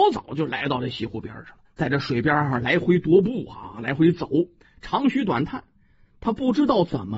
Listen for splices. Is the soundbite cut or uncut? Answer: cut